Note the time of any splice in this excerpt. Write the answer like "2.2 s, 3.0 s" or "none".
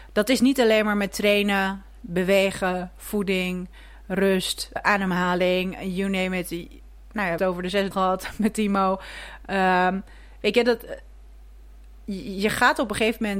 4.8 s, 7.4 s, 7.9 s